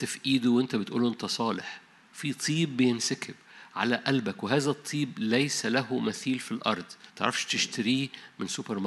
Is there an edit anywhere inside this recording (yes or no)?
yes